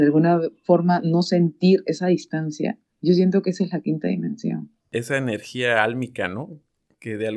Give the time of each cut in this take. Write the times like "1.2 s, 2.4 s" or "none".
2.9 s, 4.8 s